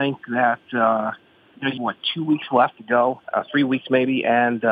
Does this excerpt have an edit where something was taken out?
yes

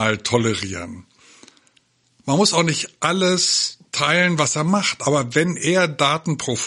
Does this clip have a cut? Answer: no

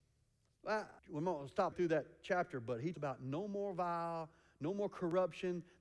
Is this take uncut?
no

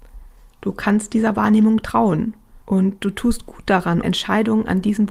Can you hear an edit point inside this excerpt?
yes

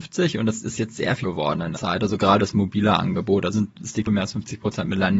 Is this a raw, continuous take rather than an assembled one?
no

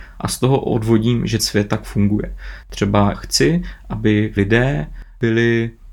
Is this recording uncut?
no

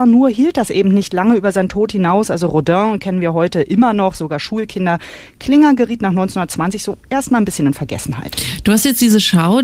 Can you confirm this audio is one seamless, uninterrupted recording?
yes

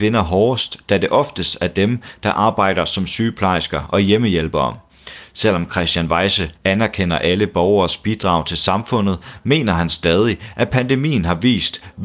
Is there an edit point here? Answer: yes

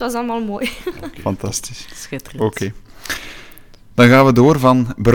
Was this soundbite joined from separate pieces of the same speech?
no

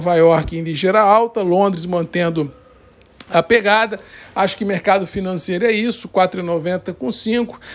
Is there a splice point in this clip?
no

